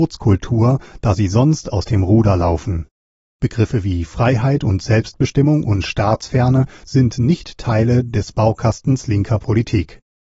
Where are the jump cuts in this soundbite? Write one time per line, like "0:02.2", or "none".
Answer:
none